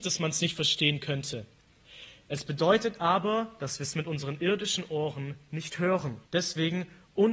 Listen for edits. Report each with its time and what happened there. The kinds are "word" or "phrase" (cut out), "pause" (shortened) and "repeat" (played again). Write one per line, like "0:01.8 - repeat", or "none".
0:06.3 - pause